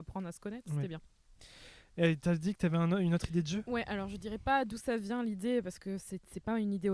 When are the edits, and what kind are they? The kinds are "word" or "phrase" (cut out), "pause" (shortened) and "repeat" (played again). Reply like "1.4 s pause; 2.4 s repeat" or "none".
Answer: none